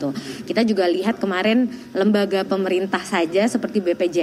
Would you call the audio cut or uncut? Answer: uncut